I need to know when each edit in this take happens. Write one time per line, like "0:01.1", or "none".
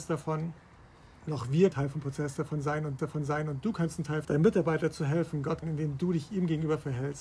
0:01.7
0:03.0
0:04.2
0:05.6